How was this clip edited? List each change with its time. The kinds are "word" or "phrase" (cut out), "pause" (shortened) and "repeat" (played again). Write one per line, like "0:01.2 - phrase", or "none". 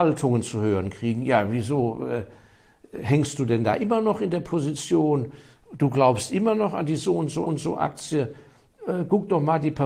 0:07.5 - repeat